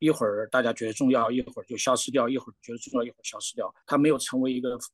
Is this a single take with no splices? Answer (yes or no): no